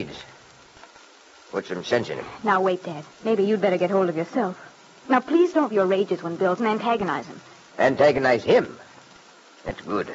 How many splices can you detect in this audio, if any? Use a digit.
3